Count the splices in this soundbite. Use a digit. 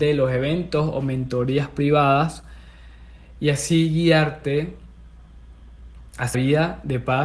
1